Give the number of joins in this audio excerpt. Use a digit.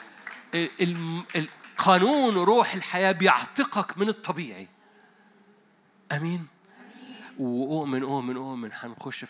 0